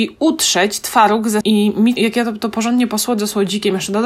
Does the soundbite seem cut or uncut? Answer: cut